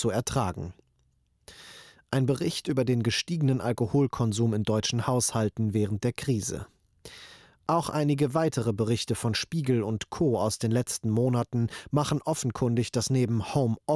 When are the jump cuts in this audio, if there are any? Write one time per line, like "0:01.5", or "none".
none